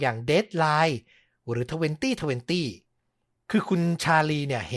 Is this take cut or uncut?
uncut